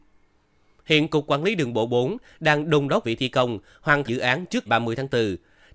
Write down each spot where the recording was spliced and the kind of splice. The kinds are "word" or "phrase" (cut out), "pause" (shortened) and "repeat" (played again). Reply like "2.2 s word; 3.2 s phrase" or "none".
3.0 s word; 4.1 s word; 4.7 s word